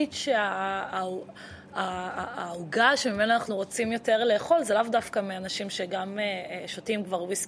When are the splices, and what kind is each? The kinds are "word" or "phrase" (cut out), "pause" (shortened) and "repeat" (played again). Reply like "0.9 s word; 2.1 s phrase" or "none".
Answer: none